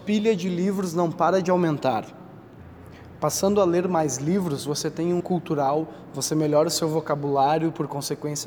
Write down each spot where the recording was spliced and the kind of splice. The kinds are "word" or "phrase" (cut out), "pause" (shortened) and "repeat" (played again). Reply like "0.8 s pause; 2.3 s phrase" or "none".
5.2 s word